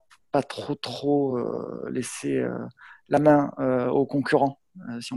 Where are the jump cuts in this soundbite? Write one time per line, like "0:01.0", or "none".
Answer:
none